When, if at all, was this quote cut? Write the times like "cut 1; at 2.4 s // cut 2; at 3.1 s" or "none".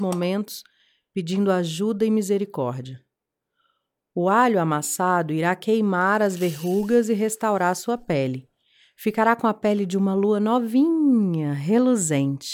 none